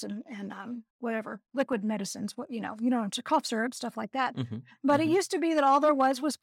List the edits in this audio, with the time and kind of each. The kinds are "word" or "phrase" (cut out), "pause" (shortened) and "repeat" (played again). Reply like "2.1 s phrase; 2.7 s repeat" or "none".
0.9 s pause